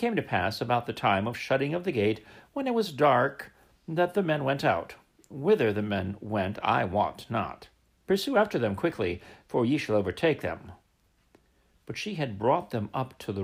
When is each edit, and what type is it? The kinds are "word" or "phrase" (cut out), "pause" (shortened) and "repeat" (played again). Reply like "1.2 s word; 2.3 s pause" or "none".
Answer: none